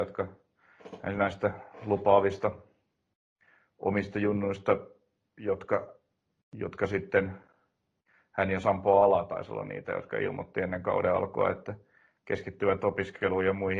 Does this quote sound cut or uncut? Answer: uncut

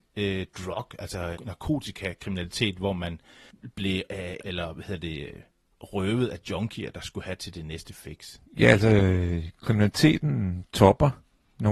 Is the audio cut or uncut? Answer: cut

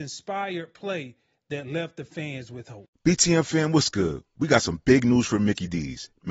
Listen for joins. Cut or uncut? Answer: uncut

